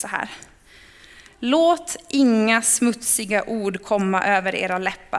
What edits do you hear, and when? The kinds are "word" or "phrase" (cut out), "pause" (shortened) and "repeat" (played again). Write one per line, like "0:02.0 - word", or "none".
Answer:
none